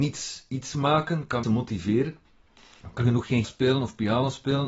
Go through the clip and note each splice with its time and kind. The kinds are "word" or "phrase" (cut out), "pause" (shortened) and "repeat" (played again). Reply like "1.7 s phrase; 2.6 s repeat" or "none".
1.4 s word; 3.0 s word; 3.4 s word